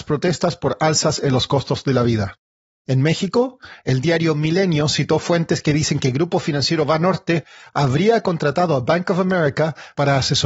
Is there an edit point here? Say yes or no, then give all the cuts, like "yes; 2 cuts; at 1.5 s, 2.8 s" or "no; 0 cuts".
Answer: no; 0 cuts